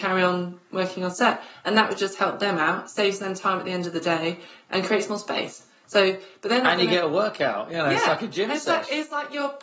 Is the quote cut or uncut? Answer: uncut